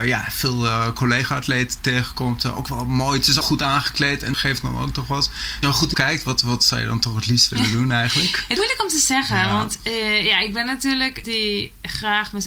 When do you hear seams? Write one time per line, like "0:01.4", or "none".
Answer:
0:03.4
0:04.3
0:05.6
0:05.9
0:08.6
0:11.2